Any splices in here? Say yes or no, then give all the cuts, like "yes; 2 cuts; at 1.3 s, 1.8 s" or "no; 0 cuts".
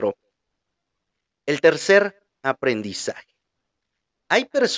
no; 0 cuts